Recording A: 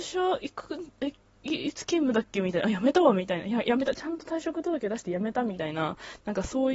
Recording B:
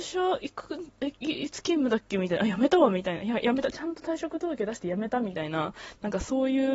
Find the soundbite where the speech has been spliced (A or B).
B